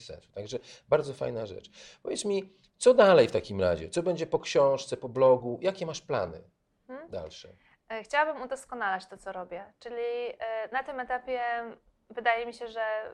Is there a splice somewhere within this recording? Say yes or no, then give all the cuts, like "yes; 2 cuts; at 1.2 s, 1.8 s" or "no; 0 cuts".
no; 0 cuts